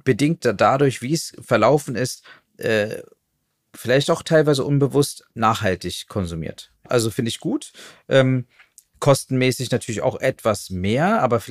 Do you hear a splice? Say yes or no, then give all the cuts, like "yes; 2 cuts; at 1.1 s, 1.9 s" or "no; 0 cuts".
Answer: no; 0 cuts